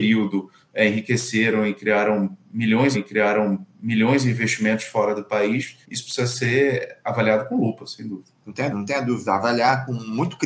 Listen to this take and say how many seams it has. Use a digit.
4